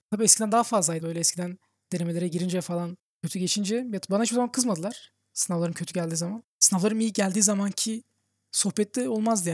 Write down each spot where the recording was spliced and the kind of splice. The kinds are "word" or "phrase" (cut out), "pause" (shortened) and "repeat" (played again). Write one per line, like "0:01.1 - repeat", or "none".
0:01.0 - word
0:06.4 - word